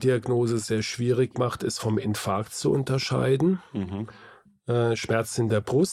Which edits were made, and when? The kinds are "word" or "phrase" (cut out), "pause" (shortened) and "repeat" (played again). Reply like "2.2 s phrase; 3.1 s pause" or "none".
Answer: none